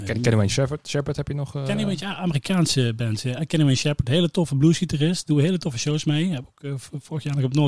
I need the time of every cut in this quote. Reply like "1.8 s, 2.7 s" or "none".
none